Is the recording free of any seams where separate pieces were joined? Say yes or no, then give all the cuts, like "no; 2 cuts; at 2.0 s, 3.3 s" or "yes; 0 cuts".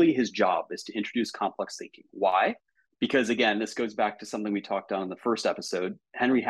yes; 0 cuts